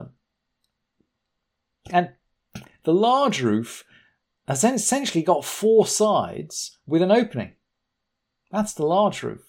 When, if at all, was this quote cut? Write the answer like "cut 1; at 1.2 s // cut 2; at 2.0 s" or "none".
none